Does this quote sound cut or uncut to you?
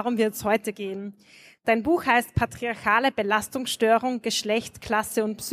uncut